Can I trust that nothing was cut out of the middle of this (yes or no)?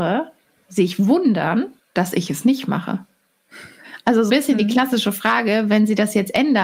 no